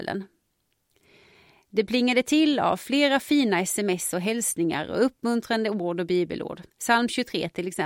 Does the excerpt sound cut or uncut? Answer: cut